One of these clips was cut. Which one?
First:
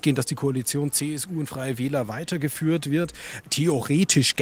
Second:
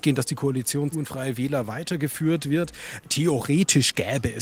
second; 1 cut; at 0.9 s

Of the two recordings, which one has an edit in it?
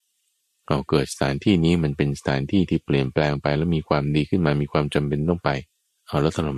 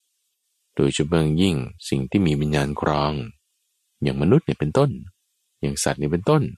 second; 1 cut; at 1.8 s

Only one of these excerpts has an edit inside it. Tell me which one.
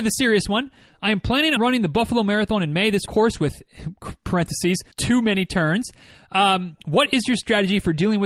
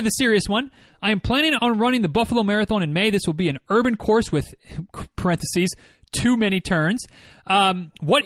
first; 3 cuts; at 1.6 s, 3.1 s, 4.9 s

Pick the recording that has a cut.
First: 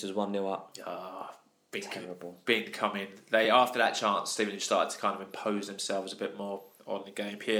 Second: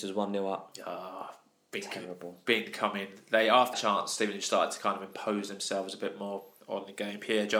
second; 1 cut; at 3.7 s

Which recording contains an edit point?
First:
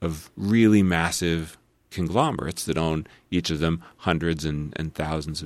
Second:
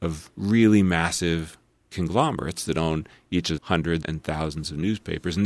second; 2 cuts; at 3.6 s, 4.0 s

